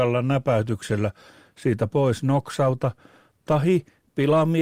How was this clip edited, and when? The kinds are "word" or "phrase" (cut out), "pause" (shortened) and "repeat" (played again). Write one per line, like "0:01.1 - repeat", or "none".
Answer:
none